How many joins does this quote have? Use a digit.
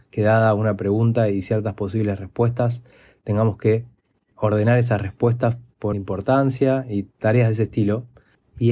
1